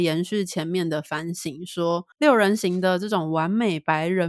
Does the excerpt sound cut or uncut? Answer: cut